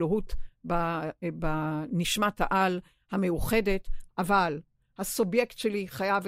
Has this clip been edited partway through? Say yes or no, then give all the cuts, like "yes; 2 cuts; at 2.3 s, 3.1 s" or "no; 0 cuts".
no; 0 cuts